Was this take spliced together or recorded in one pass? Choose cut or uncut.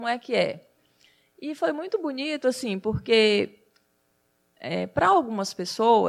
uncut